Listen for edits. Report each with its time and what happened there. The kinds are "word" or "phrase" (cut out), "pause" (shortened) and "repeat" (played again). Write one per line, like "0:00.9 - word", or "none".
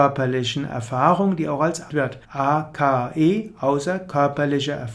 0:01.9 - phrase
0:02.2 - pause